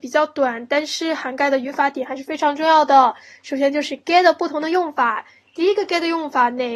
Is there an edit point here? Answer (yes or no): no